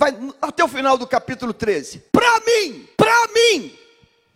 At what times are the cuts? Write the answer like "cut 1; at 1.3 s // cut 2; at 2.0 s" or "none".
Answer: cut 1; at 2.1 s // cut 2; at 2.9 s